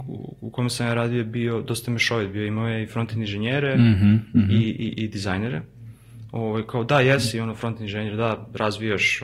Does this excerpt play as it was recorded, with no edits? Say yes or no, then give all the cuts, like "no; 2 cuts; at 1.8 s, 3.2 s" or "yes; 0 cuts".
yes; 0 cuts